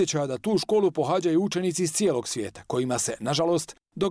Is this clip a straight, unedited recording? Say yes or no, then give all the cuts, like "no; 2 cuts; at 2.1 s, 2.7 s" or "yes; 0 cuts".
yes; 0 cuts